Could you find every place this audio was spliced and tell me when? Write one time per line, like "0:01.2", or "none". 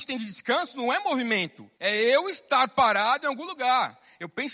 0:01.8